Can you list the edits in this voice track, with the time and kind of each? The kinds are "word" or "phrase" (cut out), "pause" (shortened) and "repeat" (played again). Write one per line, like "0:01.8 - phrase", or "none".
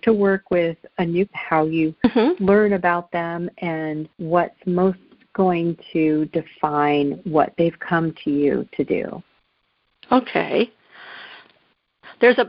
0:01.3 - word
0:04.1 - pause